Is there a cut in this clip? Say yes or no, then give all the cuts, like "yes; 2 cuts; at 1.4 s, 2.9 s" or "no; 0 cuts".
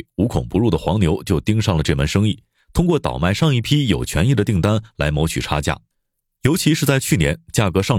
no; 0 cuts